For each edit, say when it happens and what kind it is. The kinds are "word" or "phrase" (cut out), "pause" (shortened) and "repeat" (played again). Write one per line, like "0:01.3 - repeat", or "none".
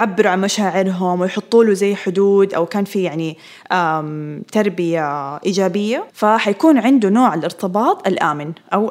0:06.1 - pause